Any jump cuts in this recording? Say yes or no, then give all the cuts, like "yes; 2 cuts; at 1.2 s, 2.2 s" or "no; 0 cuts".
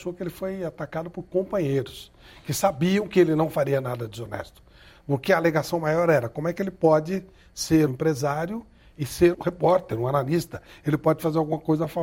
yes; 2 cuts; at 7.9 s, 9.3 s